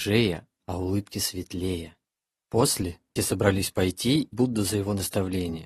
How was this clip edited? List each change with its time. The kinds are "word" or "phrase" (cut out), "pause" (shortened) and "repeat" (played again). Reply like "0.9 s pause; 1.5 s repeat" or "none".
3.2 s word; 4.3 s word